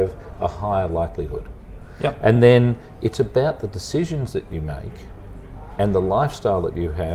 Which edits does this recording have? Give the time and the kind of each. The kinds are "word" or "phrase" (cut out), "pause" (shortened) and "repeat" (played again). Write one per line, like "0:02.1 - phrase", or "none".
none